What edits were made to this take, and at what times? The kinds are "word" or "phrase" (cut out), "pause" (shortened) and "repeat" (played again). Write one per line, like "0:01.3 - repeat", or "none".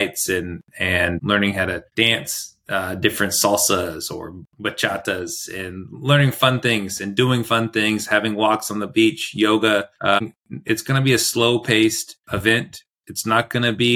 0:01.9 - pause
0:09.9 - pause
0:12.2 - pause